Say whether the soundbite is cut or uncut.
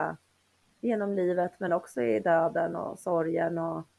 uncut